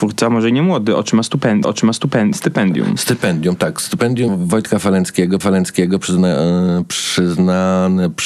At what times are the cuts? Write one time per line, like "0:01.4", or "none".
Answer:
0:01.6
0:04.3
0:05.4